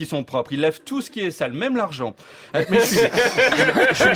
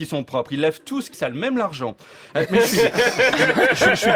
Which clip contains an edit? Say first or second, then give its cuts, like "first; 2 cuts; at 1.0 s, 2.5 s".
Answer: second; 1 cut; at 1.1 s